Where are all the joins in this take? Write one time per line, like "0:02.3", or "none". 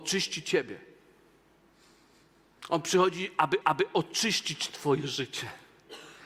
0:03.6